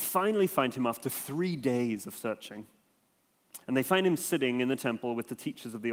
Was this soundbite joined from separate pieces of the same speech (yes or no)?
yes